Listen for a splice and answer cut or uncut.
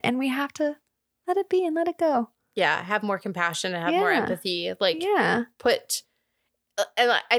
uncut